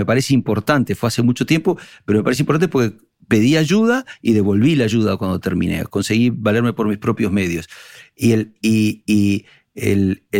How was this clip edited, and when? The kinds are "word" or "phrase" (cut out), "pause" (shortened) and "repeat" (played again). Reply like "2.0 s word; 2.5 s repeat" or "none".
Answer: none

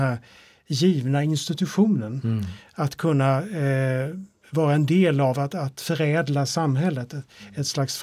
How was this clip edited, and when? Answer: none

